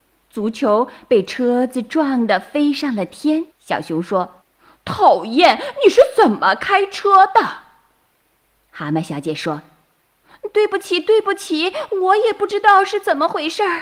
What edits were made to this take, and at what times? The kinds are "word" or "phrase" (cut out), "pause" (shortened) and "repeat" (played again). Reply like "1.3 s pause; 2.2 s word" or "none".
3.5 s pause; 4.4 s pause